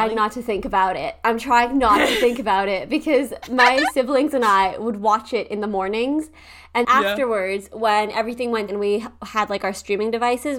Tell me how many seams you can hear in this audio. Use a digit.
2